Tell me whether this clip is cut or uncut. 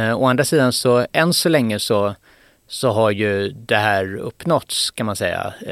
uncut